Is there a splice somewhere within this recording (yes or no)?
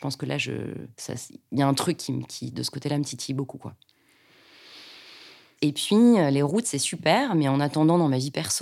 no